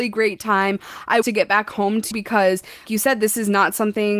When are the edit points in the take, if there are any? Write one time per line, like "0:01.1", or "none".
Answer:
0:01.2
0:02.1
0:02.9